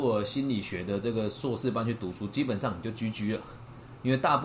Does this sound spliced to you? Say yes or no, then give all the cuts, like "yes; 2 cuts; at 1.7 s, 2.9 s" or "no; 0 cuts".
no; 0 cuts